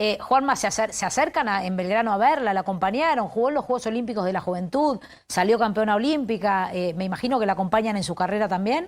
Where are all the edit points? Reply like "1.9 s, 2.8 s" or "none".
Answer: none